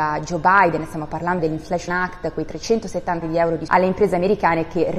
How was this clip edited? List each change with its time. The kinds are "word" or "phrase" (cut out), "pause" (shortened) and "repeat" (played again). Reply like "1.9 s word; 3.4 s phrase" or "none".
1.4 s word; 1.9 s word; 3.2 s word; 3.7 s word